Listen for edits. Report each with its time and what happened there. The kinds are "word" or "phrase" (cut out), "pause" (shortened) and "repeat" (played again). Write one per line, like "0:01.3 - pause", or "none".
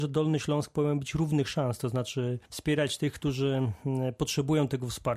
0:02.5 - pause